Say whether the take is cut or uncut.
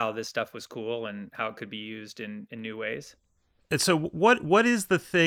uncut